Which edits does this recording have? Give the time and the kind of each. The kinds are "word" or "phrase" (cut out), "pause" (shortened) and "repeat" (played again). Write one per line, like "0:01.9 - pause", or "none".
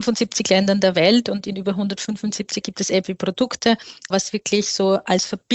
0:02.6 - phrase
0:04.1 - word